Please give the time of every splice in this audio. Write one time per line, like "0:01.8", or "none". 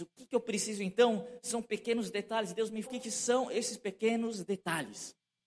0:02.8